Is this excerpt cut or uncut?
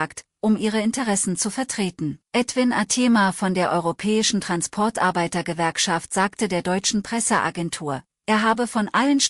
cut